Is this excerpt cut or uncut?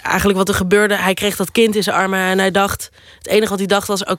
uncut